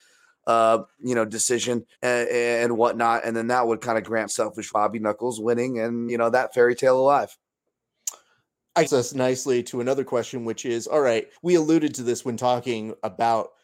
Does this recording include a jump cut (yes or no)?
yes